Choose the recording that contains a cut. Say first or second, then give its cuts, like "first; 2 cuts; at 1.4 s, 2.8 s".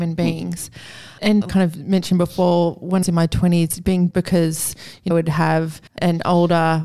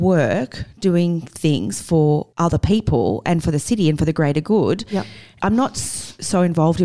first; 5 cuts; at 1.4 s, 3.0 s, 4.1 s, 5.1 s, 5.9 s